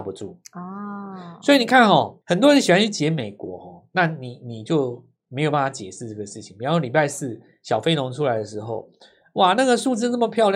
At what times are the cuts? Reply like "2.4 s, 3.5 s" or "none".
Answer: 2.2 s